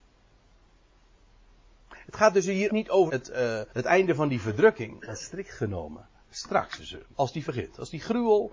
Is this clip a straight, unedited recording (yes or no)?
no